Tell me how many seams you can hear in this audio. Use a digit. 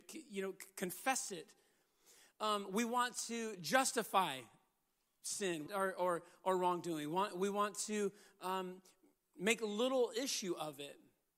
1